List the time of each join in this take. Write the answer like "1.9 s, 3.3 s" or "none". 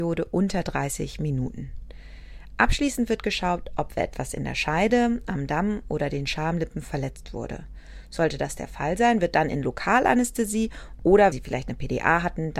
11.3 s